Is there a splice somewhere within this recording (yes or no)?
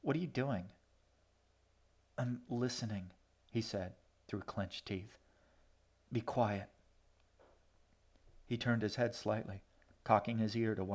no